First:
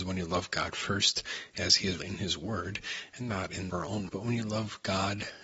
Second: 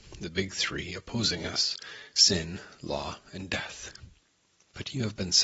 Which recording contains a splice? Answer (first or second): first